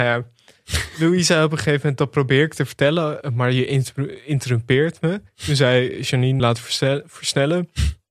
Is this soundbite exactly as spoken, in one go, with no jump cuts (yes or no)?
no